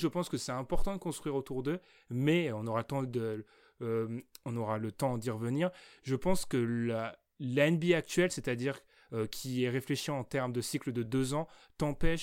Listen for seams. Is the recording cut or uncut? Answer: uncut